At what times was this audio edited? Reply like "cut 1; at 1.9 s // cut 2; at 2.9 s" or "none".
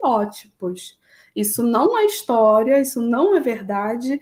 none

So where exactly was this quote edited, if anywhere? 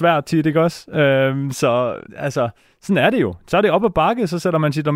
cut 1; at 2.1 s

